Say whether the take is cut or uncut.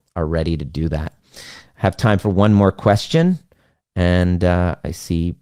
uncut